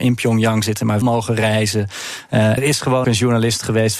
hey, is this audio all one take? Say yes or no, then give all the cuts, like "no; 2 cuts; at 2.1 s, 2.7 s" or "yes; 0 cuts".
no; 3 cuts; at 1.0 s, 2.6 s, 3.0 s